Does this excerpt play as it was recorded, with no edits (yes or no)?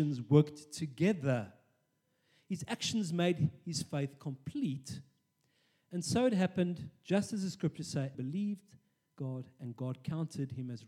no